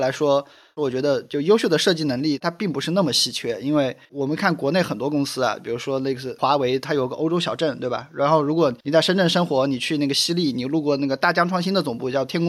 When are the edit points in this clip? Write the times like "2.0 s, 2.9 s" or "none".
4.0 s, 8.8 s